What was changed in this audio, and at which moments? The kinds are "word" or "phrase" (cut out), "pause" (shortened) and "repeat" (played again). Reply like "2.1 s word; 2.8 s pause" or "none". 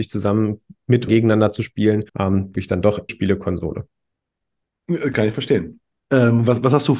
1.1 s word; 2.1 s pause; 2.5 s word; 3.1 s word; 6.0 s pause